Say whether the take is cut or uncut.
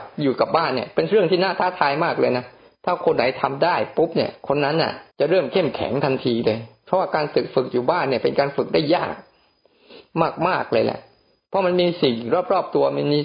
cut